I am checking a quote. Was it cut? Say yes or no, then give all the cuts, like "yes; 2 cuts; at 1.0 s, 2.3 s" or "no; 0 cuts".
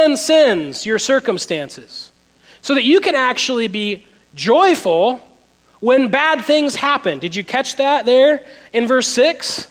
no; 0 cuts